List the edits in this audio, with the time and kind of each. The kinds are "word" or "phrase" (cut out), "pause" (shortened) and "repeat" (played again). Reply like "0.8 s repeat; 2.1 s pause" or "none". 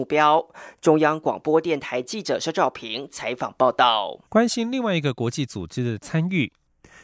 4.3 s pause

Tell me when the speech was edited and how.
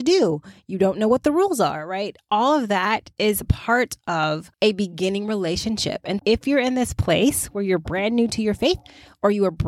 4.5 s pause; 6.2 s word

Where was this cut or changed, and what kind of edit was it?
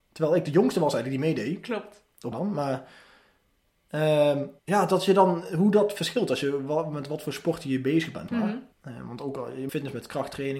2.3 s word; 4.6 s pause; 8.3 s word; 8.7 s pause; 9.7 s word

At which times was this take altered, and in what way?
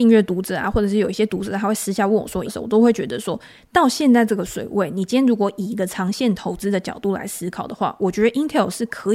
2.4 s word

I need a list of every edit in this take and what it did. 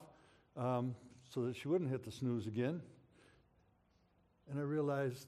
none

